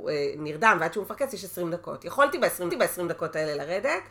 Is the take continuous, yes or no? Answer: no